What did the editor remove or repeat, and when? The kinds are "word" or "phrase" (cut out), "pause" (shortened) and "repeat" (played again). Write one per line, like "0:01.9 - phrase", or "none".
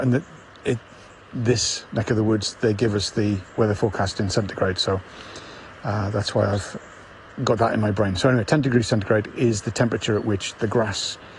0:07.2 - pause